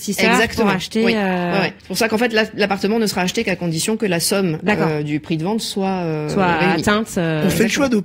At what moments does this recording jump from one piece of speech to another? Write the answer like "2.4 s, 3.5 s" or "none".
1.8 s